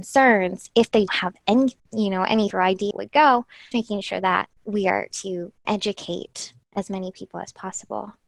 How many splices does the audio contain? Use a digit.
8